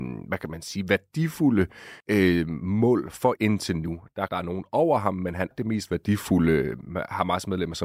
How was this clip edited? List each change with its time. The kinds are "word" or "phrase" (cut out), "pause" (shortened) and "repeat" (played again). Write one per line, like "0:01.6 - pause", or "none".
0:02.0 - pause
0:03.4 - word
0:04.3 - word
0:05.5 - word